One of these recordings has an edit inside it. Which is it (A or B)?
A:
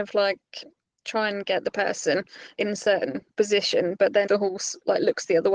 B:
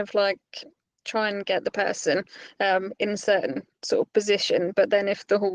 A